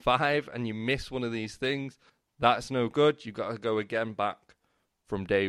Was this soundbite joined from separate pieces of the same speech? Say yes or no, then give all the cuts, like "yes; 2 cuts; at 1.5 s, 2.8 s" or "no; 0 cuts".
yes; 1 cut; at 2.1 s